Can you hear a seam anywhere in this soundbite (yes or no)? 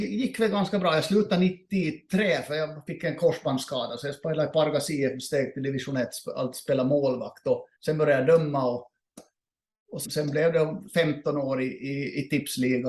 yes